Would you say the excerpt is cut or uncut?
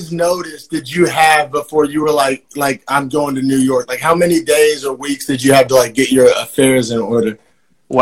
uncut